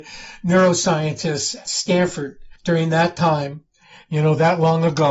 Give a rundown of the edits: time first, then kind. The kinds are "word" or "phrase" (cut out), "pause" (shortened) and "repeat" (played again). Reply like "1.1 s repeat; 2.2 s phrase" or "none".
1.7 s word; 2.6 s pause